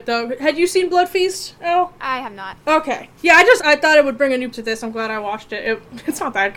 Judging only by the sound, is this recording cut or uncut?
cut